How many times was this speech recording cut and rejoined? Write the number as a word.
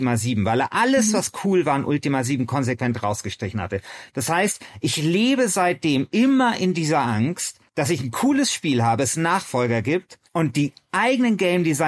two